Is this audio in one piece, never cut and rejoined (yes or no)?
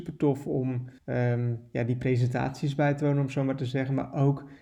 no